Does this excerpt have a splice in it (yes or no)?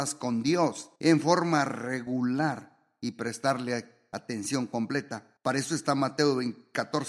yes